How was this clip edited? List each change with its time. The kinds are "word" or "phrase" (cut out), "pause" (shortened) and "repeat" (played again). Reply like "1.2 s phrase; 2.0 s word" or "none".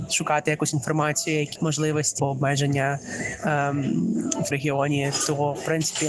1.6 s word; 2.2 s word; 4.5 s word

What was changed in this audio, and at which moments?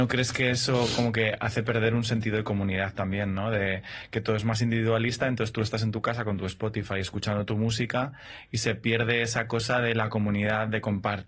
none

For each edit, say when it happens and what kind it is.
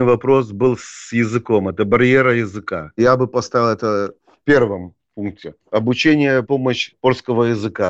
4.2 s pause; 5.6 s pause

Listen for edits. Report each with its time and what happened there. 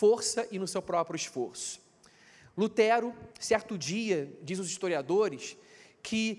3.3 s pause

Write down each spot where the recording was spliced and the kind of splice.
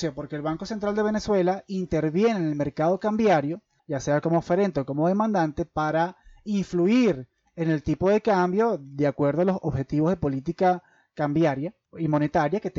none

